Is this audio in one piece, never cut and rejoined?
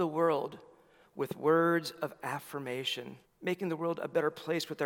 no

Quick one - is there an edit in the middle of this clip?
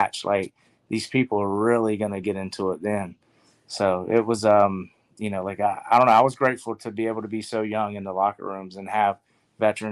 no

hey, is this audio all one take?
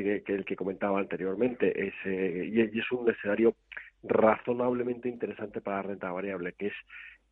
yes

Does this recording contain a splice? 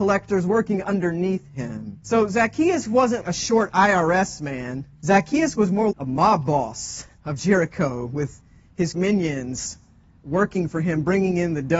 yes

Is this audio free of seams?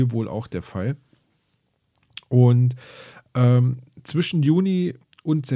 yes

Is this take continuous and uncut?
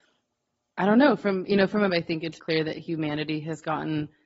no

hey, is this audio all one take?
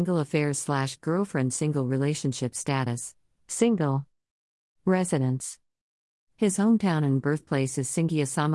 yes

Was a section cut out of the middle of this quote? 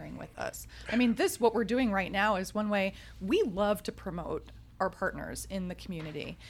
no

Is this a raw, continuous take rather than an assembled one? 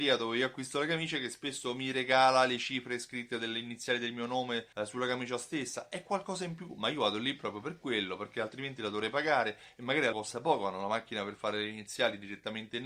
no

